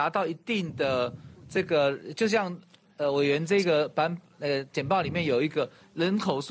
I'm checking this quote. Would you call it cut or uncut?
uncut